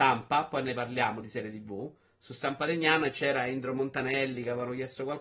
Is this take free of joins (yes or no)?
yes